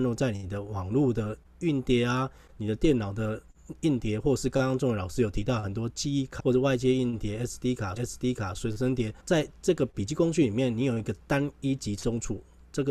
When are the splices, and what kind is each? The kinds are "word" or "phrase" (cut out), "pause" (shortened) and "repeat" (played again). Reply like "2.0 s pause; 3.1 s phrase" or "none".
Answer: 6.4 s word; 8.0 s repeat; 9.2 s pause